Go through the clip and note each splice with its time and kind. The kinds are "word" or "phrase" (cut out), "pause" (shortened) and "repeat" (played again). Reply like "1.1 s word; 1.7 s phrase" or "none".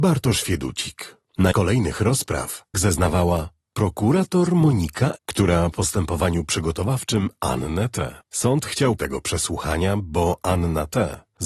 1.5 s phrase; 2.7 s phrase; 5.2 s word; 5.7 s phrase; 8.2 s pause; 9.0 s phrase